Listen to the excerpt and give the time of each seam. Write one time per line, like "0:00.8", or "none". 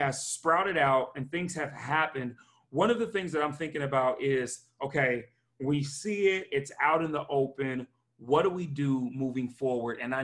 none